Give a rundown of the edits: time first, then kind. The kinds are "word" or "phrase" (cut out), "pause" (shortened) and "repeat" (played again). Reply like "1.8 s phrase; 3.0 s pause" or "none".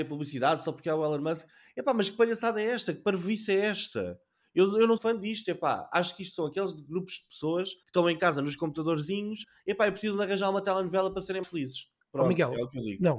5.0 s word; 7.8 s pause; 11.4 s word